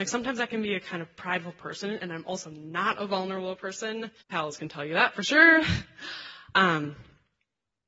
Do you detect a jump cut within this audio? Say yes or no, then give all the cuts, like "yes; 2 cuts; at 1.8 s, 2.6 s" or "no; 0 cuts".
yes; 1 cut; at 4.2 s